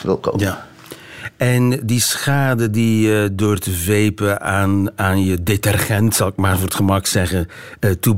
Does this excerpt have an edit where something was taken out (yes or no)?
no